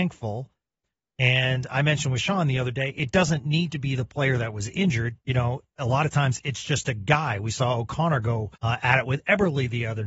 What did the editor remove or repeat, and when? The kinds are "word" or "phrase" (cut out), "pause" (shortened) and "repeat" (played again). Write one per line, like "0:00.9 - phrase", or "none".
0:05.2 - pause
0:08.6 - pause